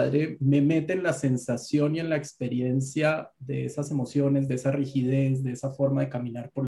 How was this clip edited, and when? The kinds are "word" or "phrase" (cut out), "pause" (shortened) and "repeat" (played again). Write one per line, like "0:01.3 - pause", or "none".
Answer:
none